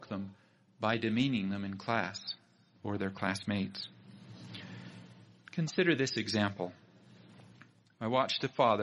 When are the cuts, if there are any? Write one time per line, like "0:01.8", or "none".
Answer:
none